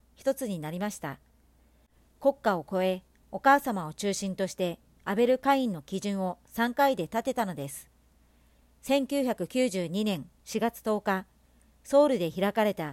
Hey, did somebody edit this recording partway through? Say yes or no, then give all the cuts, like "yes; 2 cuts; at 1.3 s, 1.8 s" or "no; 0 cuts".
no; 0 cuts